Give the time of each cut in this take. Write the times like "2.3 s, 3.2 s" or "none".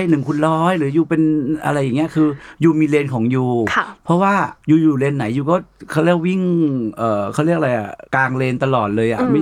4.6 s, 8.0 s